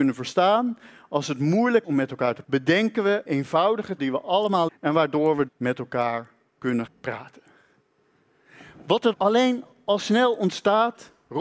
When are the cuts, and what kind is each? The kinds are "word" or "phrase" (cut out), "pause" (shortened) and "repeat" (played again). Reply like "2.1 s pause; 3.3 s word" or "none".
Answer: 1.8 s word; 2.4 s word; 3.2 s word; 4.0 s word; 4.7 s word; 5.5 s word; 6.9 s word; 9.1 s word

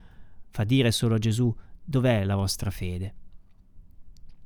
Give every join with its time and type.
none

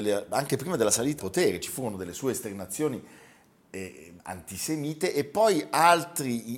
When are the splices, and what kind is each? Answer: 1.2 s word; 4.2 s pause

